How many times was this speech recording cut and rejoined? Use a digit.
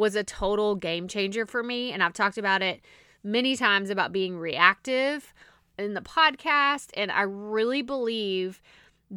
0